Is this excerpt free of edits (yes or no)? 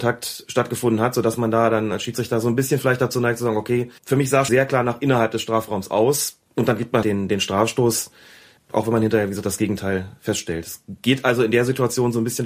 no